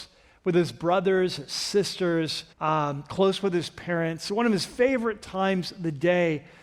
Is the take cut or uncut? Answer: cut